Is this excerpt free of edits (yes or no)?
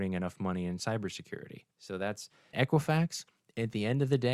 no